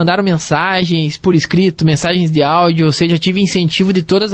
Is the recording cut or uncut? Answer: uncut